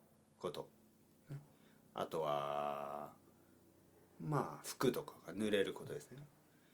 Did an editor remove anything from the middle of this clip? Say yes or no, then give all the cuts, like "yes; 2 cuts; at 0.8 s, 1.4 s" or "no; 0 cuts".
no; 0 cuts